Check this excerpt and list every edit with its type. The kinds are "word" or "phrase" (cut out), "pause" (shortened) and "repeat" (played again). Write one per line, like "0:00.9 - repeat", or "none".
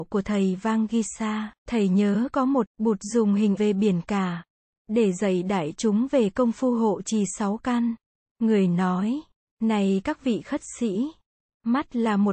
0:01.6 - pause
0:02.7 - word
0:03.6 - word